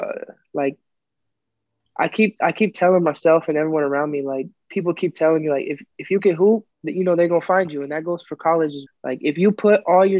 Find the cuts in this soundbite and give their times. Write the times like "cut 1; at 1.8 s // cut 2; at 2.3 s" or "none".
cut 1; at 6.7 s // cut 2; at 8.9 s